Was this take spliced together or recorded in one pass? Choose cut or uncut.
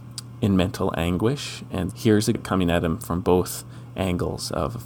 cut